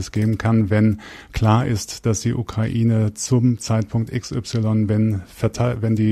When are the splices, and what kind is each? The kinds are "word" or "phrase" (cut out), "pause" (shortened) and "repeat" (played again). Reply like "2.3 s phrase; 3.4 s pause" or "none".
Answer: none